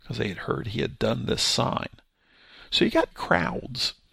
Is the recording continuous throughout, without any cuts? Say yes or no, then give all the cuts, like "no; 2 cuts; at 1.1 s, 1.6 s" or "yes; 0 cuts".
no; 1 cut; at 3.1 s